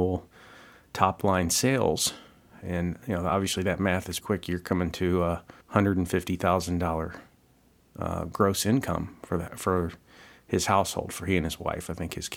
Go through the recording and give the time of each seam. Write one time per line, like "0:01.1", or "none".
0:04.2
0:05.6